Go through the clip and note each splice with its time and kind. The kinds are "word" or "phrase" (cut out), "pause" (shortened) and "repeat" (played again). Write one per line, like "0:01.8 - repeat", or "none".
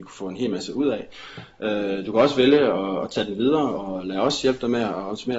none